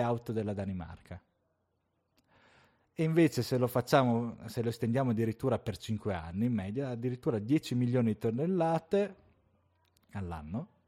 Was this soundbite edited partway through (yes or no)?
no